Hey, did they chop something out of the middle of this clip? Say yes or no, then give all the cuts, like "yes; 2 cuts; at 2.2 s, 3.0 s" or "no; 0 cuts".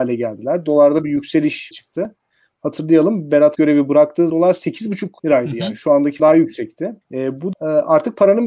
yes; 7 cuts; at 1.7 s, 3.5 s, 4.3 s, 5.2 s, 6.2 s, 7.0 s, 7.5 s